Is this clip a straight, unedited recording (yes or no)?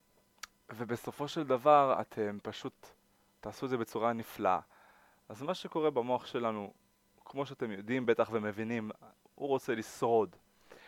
yes